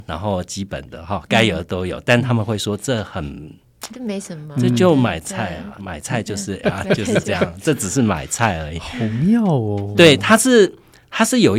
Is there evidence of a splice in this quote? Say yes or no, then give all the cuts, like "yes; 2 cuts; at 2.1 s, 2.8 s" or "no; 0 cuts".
yes; 1 cut; at 6.6 s